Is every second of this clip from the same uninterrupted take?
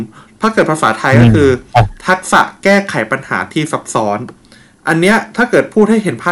yes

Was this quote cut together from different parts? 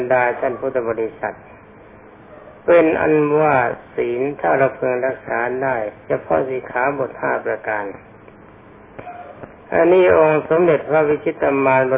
no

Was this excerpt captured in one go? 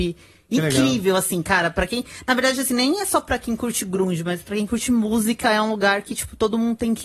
yes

